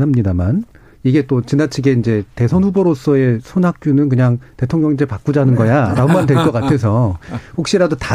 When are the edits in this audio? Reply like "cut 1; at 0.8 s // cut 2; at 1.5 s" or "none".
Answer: none